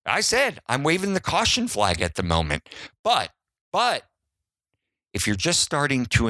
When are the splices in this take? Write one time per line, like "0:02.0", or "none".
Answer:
none